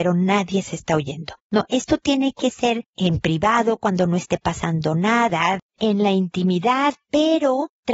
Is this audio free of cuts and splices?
yes; 0 cuts

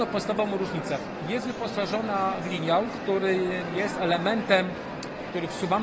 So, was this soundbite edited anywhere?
no; 0 cuts

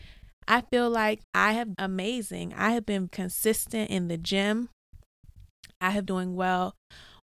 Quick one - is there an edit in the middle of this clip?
yes; 4 cuts; at 1.2 s, 1.7 s, 3.1 s, 6.1 s

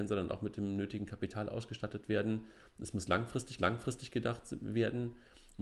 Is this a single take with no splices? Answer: no; 1 cut; at 3.6 s

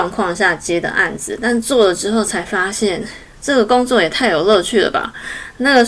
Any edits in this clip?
no; 0 cuts

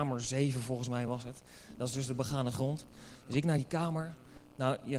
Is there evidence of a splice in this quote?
no; 0 cuts

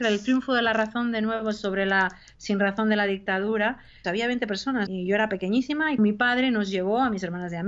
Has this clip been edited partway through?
yes; 3 cuts; at 4.0 s, 4.9 s, 6.0 s

